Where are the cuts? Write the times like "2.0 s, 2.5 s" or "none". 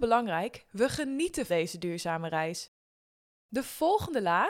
1.5 s

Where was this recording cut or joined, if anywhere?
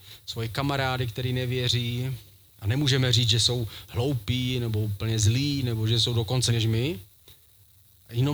6.5 s

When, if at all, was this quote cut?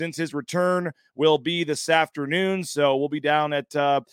none

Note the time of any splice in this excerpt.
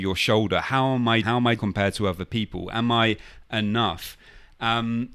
1.2 s, 1.6 s

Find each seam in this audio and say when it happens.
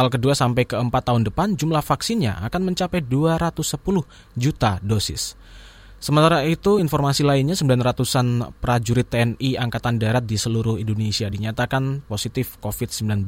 none

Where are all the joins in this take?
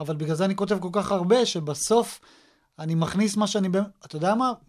none

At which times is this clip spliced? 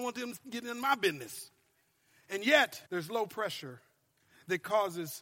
2.9 s

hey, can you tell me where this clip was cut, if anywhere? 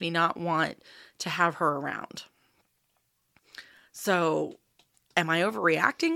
none

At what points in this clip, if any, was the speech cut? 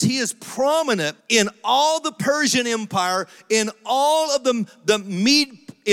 1.2 s

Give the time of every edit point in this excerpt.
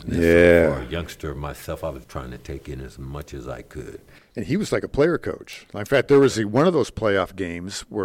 2.0 s

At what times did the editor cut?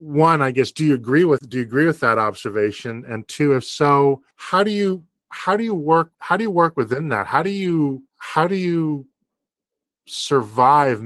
4.3 s, 6.1 s, 8.1 s

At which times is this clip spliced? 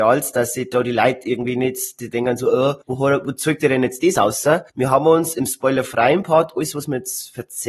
2.8 s, 4.7 s

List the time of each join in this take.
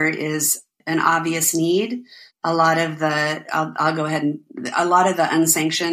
none

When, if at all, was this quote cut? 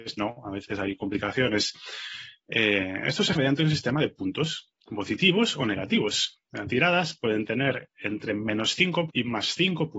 3.4 s, 4.8 s, 9.1 s

